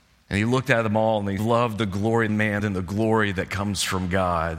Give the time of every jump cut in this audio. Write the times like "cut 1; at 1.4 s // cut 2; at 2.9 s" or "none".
cut 1; at 1.4 s // cut 2; at 2.3 s // cut 3; at 2.6 s